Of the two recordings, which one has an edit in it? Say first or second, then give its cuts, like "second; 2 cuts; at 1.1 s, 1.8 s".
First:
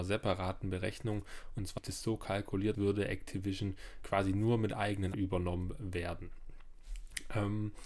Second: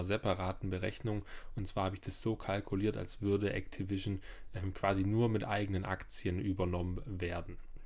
first; 4 cuts; at 1.8 s, 2.7 s, 4.0 s, 5.1 s